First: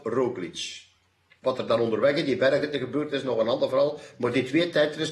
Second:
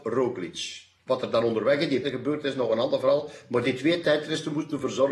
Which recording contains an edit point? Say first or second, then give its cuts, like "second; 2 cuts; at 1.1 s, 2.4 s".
second; 2 cuts; at 1.0 s, 2.0 s